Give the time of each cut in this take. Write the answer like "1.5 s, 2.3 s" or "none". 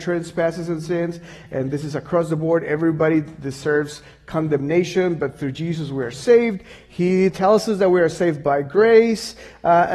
none